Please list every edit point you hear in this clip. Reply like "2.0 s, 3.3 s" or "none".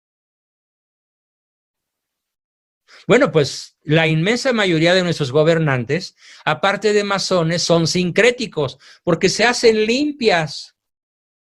none

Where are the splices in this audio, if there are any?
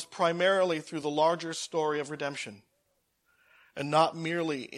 none

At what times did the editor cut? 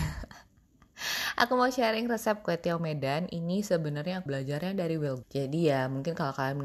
4.3 s, 5.2 s

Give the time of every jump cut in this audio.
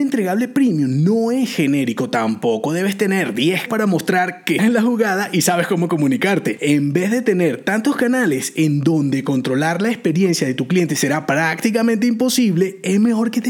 3.7 s, 4.6 s

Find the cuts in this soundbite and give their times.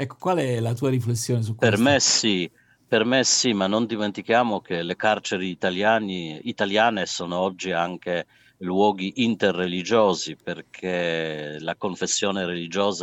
none

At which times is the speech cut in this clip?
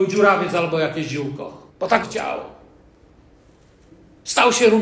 1.7 s, 2.0 s

